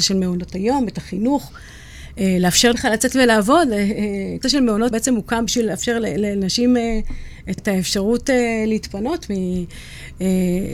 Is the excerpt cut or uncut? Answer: cut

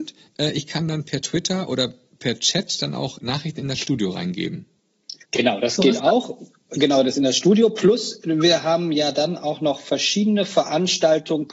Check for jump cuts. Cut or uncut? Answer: cut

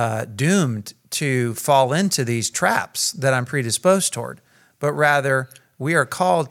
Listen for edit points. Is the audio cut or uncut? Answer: uncut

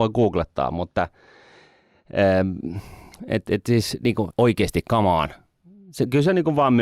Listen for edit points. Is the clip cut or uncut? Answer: cut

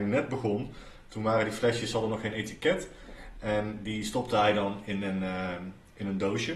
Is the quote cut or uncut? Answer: uncut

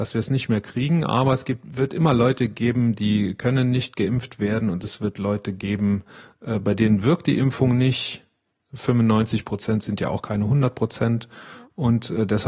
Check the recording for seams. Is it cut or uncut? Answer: uncut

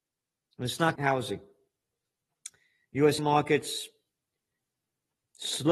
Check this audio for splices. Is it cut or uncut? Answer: cut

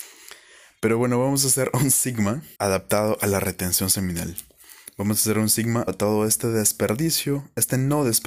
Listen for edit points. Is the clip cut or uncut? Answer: cut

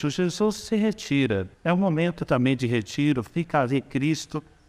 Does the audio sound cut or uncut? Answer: cut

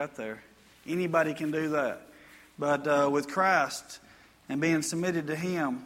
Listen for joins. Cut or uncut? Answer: uncut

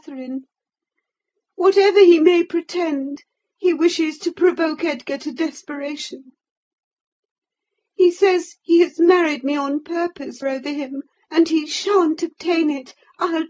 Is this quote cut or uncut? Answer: cut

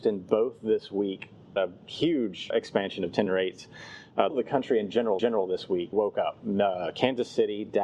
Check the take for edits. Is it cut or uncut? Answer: cut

